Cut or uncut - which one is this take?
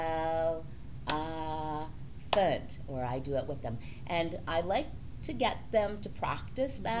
uncut